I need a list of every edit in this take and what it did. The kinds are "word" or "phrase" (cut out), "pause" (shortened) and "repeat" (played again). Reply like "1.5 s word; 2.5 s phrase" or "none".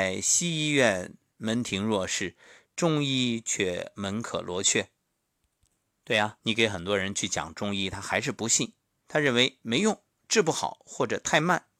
6.4 s word